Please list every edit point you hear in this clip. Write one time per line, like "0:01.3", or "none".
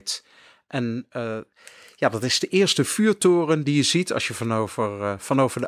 none